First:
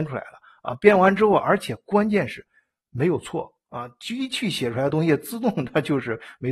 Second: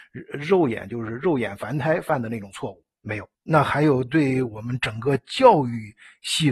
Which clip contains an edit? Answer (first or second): second